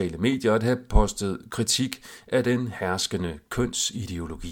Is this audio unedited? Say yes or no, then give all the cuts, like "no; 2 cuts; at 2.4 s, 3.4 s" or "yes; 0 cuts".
yes; 0 cuts